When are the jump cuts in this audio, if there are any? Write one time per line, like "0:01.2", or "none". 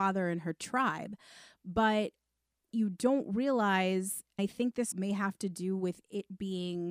0:02.7
0:04.4
0:04.9

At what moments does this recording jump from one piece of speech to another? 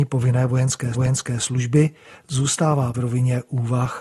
0:00.9
0:02.9

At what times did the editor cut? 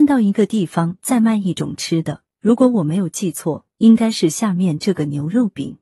0:02.3

